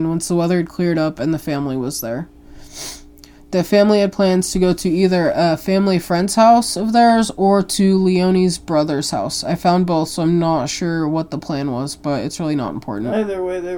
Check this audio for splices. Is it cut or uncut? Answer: uncut